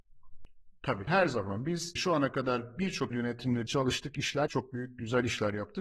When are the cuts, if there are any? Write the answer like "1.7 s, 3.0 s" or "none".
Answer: 1.1 s, 2.0 s, 3.1 s, 3.7 s, 4.5 s